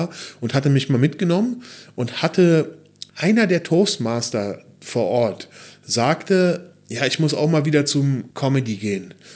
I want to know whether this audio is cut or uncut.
cut